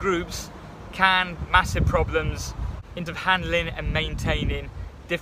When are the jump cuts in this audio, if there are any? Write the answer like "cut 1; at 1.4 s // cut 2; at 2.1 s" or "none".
cut 1; at 1.4 s // cut 2; at 3.1 s